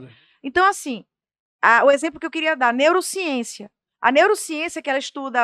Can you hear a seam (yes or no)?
no